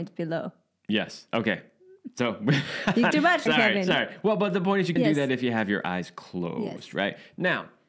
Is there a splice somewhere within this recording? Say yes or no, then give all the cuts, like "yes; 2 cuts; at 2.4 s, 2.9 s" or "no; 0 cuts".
yes; 3 cuts; at 3.1 s, 3.5 s, 5.0 s